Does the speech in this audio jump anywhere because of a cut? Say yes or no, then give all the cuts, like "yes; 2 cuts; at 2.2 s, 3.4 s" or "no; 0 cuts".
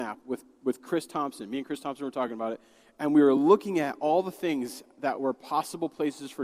no; 0 cuts